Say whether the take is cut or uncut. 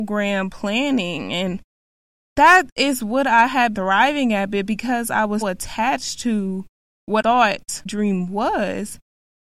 cut